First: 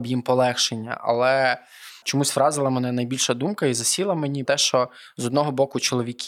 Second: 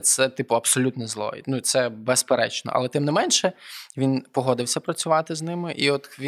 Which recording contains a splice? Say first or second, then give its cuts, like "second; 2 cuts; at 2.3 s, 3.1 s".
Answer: first; 1 cut; at 4.4 s